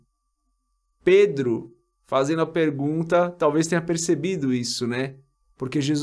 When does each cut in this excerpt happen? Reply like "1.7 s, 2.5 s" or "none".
none